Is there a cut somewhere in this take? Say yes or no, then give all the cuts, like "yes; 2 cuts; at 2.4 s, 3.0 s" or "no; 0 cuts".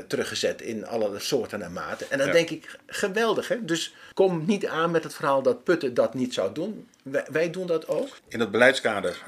yes; 2 cuts; at 1.2 s, 4.1 s